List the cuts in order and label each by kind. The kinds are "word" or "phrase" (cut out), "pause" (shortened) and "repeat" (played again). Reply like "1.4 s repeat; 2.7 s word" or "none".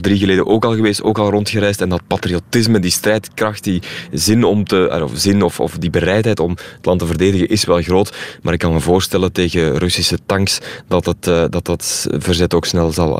none